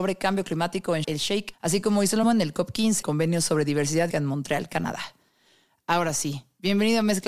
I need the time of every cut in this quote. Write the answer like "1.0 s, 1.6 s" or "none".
1.0 s, 1.5 s, 2.2 s, 3.0 s, 4.1 s